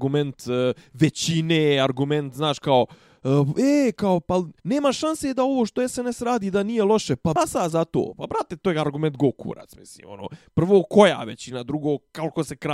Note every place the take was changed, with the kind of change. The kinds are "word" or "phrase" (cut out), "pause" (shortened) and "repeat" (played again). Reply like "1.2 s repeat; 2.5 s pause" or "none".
4.6 s pause